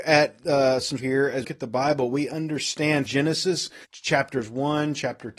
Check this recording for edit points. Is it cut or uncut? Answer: cut